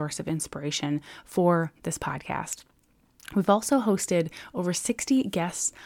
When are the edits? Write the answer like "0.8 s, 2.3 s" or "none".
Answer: 1.8 s